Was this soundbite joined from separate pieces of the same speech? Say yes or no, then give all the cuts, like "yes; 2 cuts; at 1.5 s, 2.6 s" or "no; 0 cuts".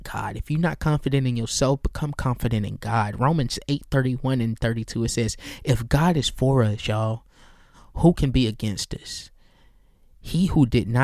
no; 0 cuts